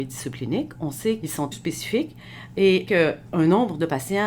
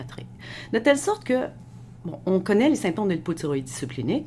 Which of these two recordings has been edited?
first; 3 cuts; at 1.2 s, 1.5 s, 2.9 s

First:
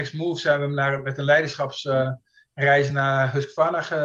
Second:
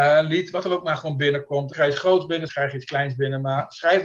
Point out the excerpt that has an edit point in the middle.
second; 2 cuts; at 1.7 s, 2.5 s

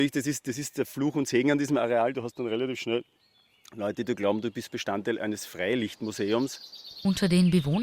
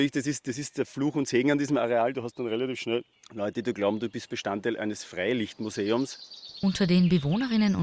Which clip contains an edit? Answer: second; 1 cut; at 3.1 s

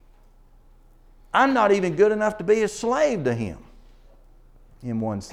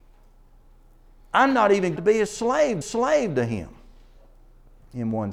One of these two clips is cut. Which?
second; 2 cuts; at 2.0 s, 2.8 s

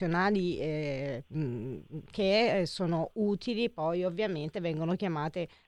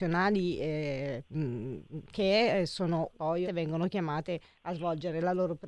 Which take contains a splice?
second; 2 cuts; at 3.1 s, 3.4 s

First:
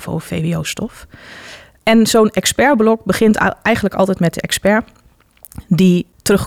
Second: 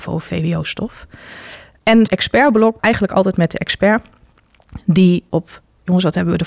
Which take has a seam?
second; 3 cuts; at 2.1 s, 2.8 s, 5.3 s

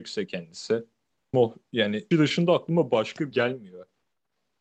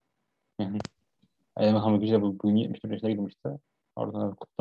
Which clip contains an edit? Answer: first; 3 cuts; at 1.3 s, 2.1 s, 3.3 s

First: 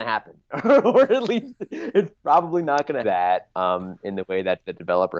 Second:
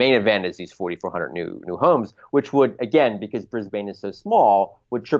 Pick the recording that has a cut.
first; 1 cut; at 3.0 s

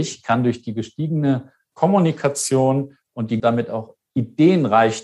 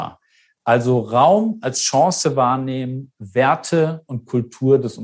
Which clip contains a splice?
first; 1 cut; at 3.4 s

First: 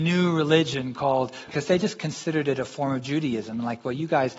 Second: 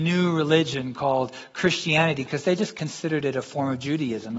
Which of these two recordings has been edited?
first; 1 cut; at 1.5 s

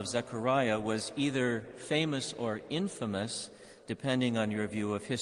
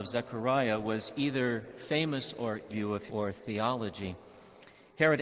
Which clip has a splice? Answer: second; 2 cuts; at 2.7 s, 3.1 s

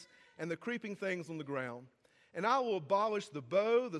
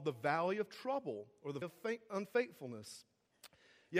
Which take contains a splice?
second; 1 cut; at 1.6 s

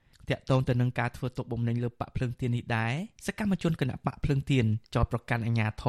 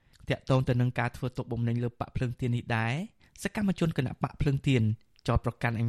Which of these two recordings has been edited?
first; 2 cuts; at 3.2 s, 4.9 s

